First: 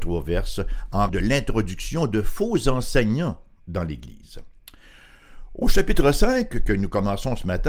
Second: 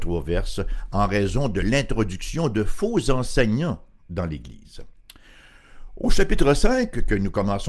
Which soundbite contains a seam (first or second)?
first